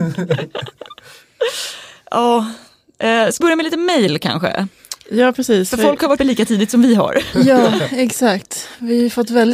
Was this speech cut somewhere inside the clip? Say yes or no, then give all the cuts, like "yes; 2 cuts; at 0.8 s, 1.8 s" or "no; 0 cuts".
yes; 2 cuts; at 3.4 s, 6.2 s